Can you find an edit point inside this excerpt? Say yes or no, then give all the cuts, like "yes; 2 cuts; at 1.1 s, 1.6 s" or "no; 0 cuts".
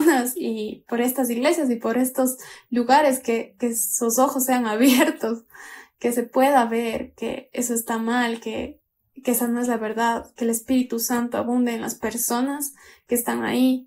no; 0 cuts